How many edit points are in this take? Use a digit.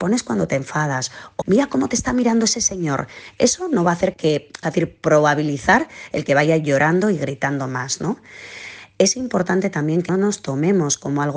4